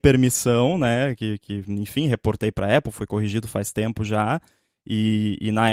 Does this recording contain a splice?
no; 0 cuts

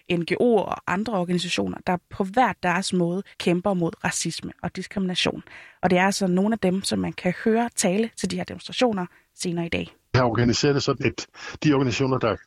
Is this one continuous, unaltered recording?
no; 3 cuts; at 3.3 s, 10.1 s, 11.0 s

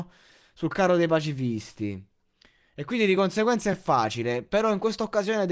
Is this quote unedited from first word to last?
yes; 0 cuts

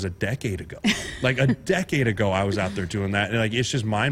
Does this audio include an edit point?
no; 0 cuts

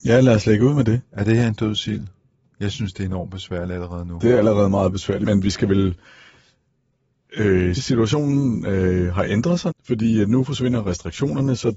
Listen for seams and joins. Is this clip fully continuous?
no; 3 cuts; at 5.2 s, 7.8 s, 9.7 s

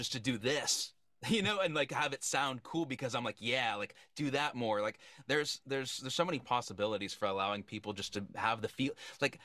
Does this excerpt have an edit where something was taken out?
no; 0 cuts

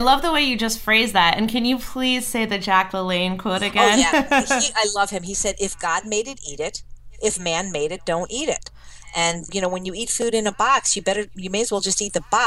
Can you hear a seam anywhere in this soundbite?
yes; 1 cut; at 9.5 s

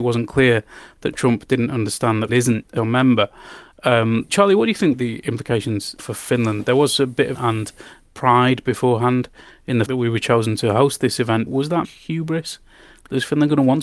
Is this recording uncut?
no; 9 cuts; at 2.3 s, 2.8 s, 4.3 s, 4.9 s, 6.0 s, 7.3 s, 9.9 s, 11.5 s, 11.8 s

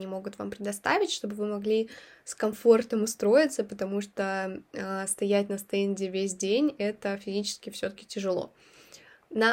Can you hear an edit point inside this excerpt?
no; 0 cuts

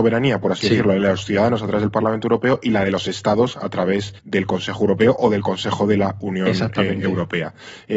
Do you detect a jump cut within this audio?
yes; 1 cut; at 4.2 s

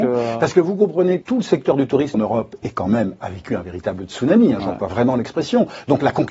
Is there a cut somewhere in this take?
yes; 2 cuts; at 1.2 s, 2.1 s

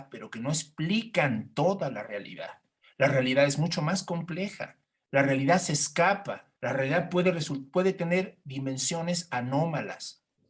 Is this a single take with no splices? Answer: no; 1 cut; at 6.6 s

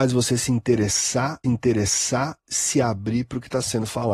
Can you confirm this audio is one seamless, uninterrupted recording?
no; 1 cut; at 1.4 s

